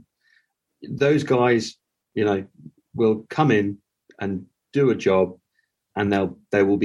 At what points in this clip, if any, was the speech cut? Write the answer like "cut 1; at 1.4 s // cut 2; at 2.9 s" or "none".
none